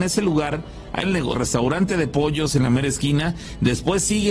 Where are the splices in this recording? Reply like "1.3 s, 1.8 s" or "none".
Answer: 1.0 s, 1.3 s